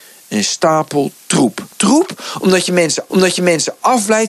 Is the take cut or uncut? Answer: cut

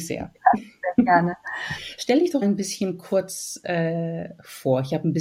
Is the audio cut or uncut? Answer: cut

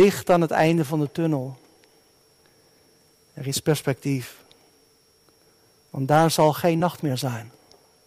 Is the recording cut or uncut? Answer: uncut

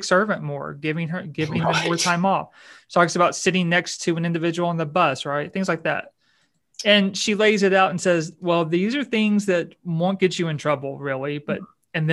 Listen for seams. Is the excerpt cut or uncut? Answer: uncut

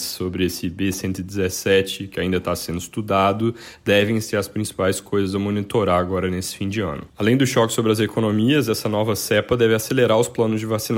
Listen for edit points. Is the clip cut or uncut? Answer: uncut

